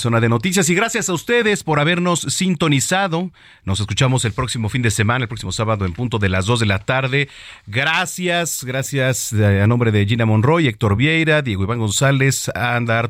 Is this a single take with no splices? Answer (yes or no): yes